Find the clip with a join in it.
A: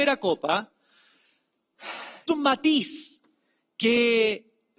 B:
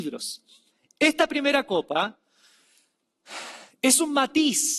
A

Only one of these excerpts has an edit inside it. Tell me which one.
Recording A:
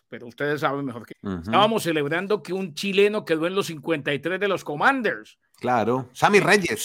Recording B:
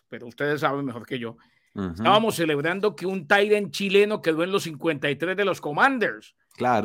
A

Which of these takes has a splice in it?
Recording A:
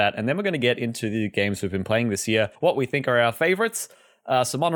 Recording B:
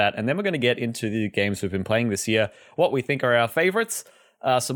A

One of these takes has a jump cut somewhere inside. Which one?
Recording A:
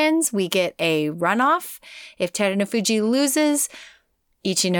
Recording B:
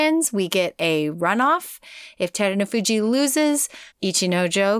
B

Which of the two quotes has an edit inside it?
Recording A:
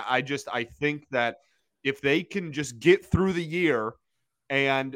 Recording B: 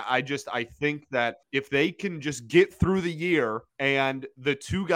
B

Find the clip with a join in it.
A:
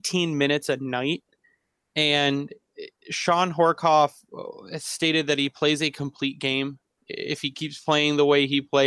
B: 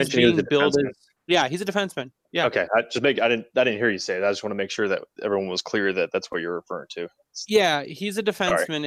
B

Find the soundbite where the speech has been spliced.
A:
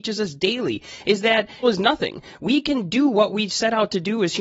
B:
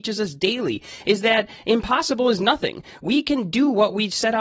A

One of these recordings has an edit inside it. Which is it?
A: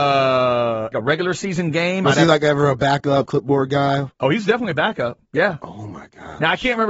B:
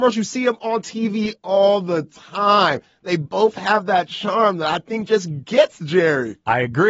A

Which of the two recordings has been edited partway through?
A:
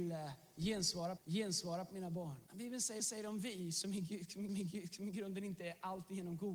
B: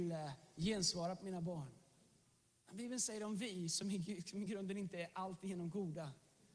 A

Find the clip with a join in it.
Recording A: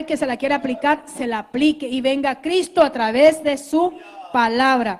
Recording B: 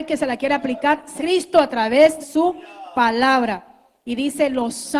B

